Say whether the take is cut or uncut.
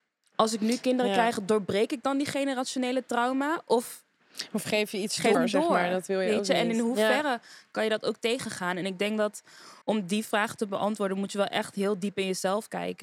cut